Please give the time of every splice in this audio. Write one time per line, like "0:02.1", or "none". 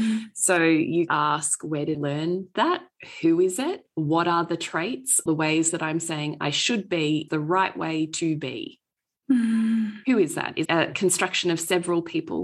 0:01.1
0:01.9
0:05.3
0:07.3
0:10.7